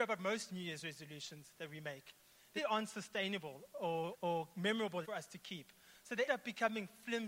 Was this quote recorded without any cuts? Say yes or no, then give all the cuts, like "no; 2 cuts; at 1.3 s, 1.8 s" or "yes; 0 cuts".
no; 4 cuts; at 2.6 s, 4.1 s, 5.0 s, 6.3 s